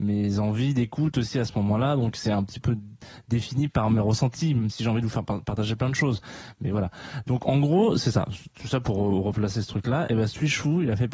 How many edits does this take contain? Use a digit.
0